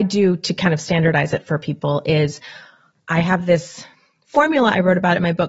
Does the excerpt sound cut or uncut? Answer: uncut